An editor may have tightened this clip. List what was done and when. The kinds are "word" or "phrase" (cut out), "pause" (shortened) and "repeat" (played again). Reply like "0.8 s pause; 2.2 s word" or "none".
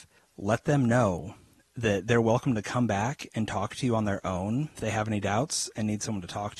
4.8 s word